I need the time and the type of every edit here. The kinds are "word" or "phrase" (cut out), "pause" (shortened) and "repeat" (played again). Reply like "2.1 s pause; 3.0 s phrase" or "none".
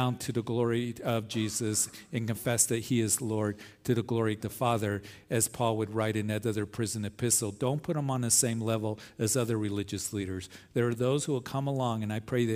4.4 s word